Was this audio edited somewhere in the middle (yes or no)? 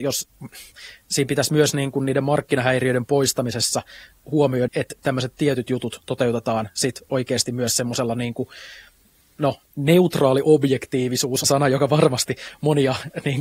yes